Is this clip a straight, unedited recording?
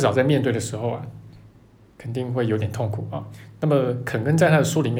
yes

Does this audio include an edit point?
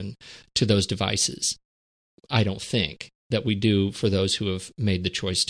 no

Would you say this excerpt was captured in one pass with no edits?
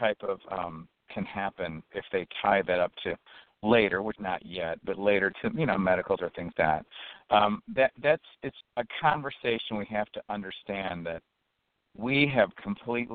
no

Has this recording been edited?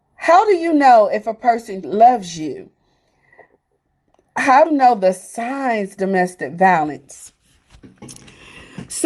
yes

